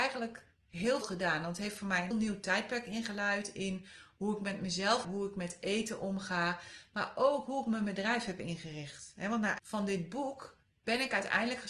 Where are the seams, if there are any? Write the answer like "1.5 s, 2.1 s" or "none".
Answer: 1.0 s, 2.1 s, 5.0 s, 9.6 s

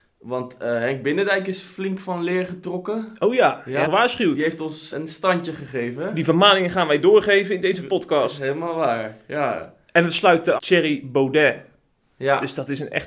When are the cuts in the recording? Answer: 3.8 s, 4.9 s, 10.6 s

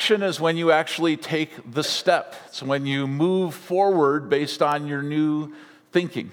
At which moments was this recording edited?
none

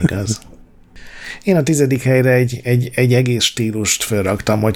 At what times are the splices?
none

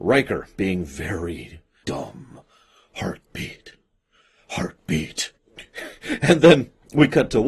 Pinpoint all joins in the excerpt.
1.8 s, 5.4 s

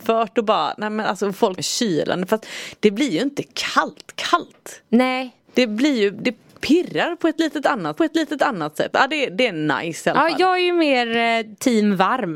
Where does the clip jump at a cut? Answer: 1.6 s, 5.4 s, 8.0 s

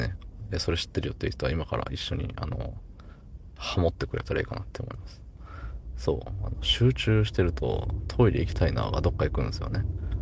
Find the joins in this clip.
3.6 s

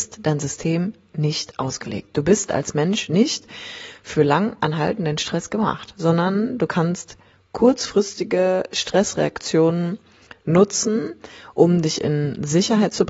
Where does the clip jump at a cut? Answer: none

